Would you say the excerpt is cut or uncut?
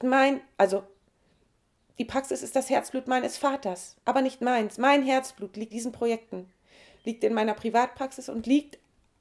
cut